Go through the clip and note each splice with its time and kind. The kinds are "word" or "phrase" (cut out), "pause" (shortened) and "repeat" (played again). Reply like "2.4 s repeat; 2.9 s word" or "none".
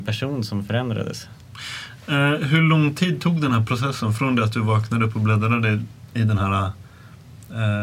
none